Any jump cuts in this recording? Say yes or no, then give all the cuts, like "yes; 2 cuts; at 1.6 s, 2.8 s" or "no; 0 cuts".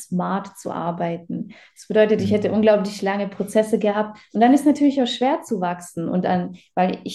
no; 0 cuts